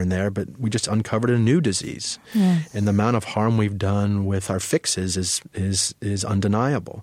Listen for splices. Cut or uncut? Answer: uncut